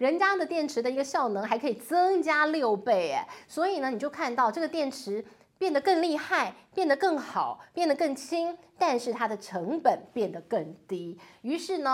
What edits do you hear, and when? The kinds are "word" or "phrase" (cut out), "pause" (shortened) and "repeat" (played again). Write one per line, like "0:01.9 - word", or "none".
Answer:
none